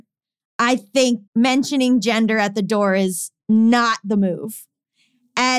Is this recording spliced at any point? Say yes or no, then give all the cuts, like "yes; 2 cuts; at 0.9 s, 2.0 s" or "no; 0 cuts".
yes; 1 cut; at 1.3 s